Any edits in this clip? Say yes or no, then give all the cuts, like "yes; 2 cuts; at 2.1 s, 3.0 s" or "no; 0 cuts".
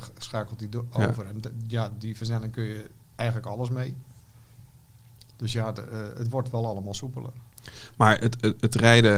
no; 0 cuts